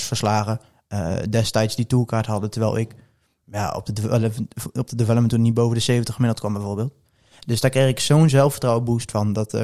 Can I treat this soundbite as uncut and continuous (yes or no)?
yes